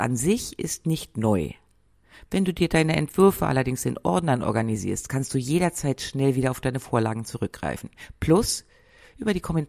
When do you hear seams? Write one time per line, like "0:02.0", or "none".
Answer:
none